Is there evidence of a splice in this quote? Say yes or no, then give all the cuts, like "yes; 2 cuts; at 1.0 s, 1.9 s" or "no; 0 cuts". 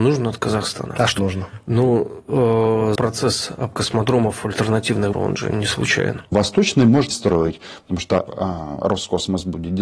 yes; 7 cuts; at 1.2 s, 2.9 s, 3.7 s, 5.1 s, 6.3 s, 7.1 s, 8.3 s